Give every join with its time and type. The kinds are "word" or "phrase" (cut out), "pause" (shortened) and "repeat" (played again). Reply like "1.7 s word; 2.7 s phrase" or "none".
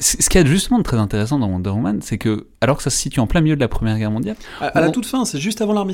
none